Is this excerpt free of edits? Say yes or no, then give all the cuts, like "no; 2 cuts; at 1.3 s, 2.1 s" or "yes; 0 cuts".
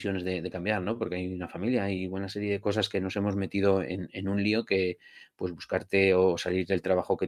yes; 0 cuts